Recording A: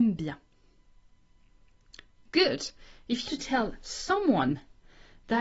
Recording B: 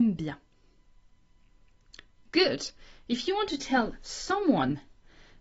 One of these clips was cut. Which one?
A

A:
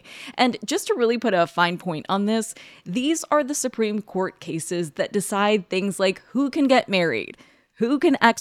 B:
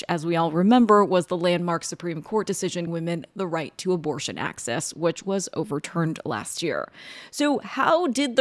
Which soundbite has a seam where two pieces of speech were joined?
B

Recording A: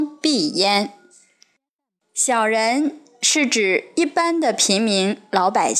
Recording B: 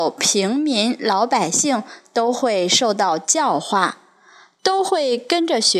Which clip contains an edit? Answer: A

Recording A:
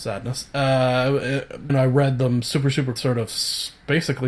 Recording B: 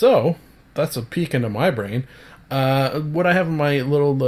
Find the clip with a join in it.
A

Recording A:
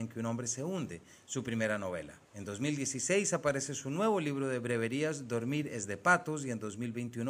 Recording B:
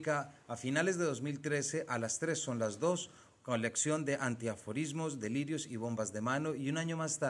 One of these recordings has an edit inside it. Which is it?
A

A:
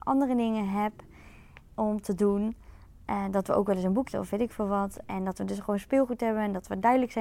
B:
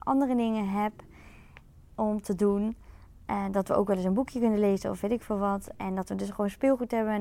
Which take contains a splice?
A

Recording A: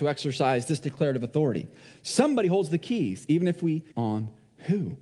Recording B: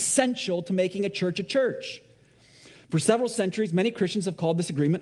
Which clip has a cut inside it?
A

